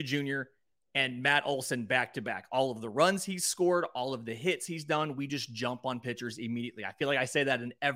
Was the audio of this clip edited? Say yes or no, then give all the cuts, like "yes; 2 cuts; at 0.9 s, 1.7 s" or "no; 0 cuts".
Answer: no; 0 cuts